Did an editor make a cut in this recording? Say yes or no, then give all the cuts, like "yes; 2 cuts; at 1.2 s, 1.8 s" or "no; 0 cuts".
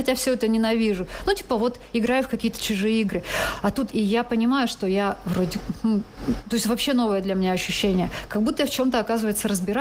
yes; 1 cut; at 3.9 s